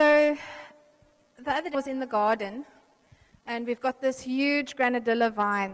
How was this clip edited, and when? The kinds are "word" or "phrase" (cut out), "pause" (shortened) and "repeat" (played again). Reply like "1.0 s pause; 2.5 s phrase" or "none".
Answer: 1.7 s word